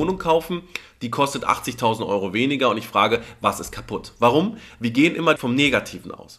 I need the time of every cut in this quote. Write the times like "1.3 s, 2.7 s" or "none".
5.4 s